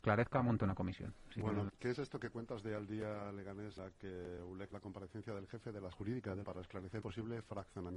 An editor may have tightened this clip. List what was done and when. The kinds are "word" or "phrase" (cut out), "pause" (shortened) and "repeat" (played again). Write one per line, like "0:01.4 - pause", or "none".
0:01.7 - word
0:03.8 - word
0:04.7 - word
0:05.9 - word
0:06.4 - word
0:07.0 - word